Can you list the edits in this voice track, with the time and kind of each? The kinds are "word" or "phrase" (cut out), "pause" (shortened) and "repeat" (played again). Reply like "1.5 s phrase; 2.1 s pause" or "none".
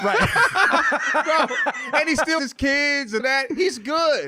2.4 s word; 3.2 s word